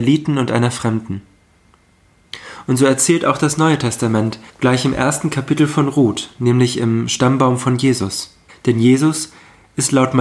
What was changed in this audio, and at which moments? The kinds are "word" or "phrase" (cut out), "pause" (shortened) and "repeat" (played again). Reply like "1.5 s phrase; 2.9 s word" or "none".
4.5 s pause; 8.5 s pause